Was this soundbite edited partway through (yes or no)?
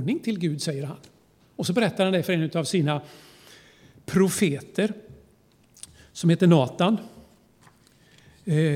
no